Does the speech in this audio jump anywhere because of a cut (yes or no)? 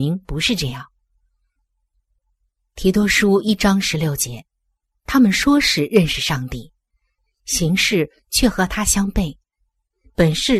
yes